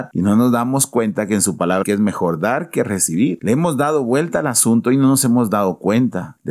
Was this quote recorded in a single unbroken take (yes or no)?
no